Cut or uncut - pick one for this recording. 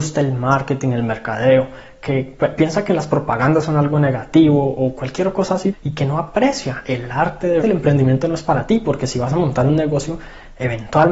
cut